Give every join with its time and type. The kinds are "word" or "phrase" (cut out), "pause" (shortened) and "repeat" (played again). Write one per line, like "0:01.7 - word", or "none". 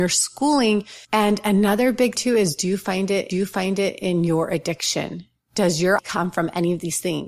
0:01.0 - pause
0:02.2 - word
0:03.3 - repeat
0:06.0 - word